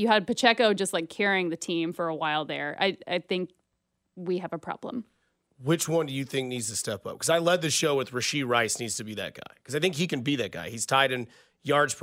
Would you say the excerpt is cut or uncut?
uncut